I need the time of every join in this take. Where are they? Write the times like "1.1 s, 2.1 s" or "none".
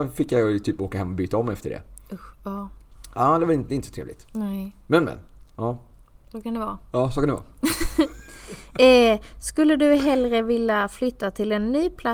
none